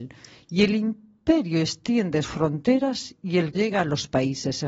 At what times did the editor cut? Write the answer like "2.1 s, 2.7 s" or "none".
2.2 s, 3.5 s